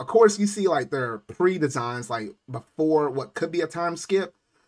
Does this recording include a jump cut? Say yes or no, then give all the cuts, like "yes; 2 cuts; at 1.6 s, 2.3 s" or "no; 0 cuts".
no; 0 cuts